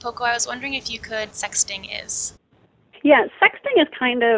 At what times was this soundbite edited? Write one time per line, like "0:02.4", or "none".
0:01.3